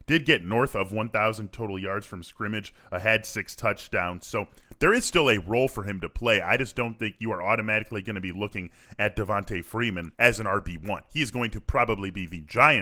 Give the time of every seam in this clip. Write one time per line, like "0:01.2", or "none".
0:10.1